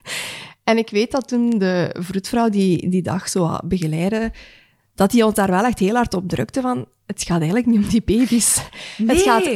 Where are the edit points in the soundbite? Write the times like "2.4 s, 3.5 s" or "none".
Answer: none